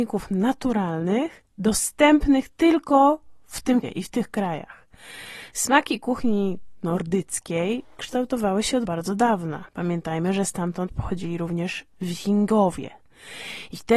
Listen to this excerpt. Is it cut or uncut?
cut